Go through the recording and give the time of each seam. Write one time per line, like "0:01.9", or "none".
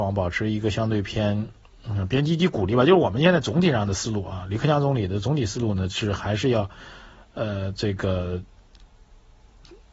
none

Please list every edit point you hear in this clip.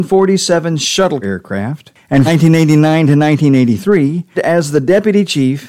0:01.2
0:02.3
0:04.3

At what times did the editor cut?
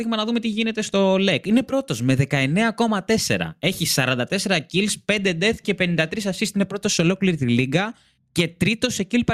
none

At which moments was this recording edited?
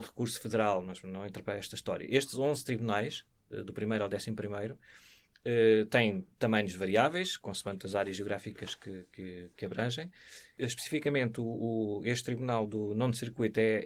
0:06.3

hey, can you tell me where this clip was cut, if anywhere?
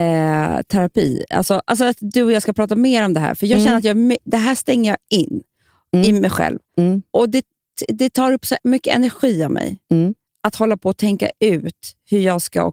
none

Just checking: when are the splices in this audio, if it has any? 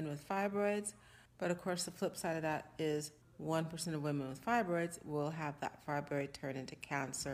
0:01.3
0:03.2

